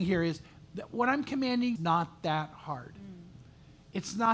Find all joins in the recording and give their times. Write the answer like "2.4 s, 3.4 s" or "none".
1.8 s